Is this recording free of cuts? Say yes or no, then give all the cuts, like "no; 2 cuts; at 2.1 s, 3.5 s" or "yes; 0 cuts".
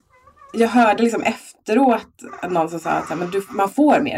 yes; 0 cuts